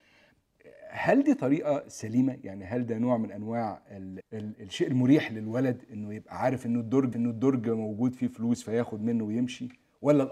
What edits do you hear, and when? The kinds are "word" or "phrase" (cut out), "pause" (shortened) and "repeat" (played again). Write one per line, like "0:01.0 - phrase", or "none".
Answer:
0:04.2 - word
0:04.5 - word
0:07.1 - repeat